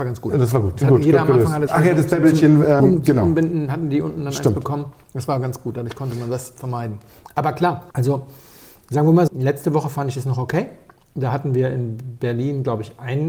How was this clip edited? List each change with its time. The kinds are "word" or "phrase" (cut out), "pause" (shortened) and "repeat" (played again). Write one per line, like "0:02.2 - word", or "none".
0:01.7 - phrase
0:02.8 - word
0:07.9 - pause
0:09.3 - word